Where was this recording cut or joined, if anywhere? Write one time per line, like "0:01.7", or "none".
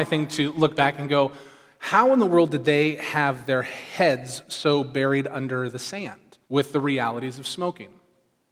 0:06.4

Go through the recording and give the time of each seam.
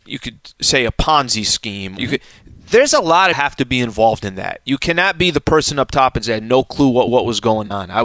0:02.0
0:03.3
0:07.1

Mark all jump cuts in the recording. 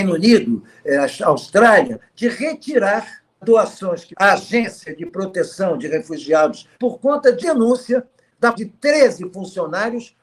0:02.0
0:03.4
0:04.1
0:06.7
0:07.4
0:08.5

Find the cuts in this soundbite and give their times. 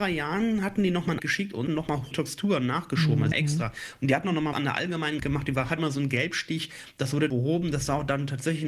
0:01.2
0:01.7
0:02.1
0:03.3
0:04.5
0:05.2
0:05.8
0:07.3

